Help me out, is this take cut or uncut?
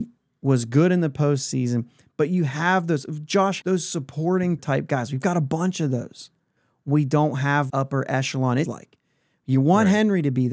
cut